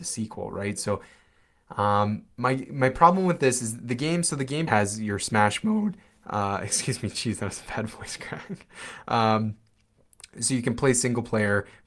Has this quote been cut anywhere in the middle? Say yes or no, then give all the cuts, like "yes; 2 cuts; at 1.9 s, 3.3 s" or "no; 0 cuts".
yes; 2 cuts; at 2.3 s, 4.7 s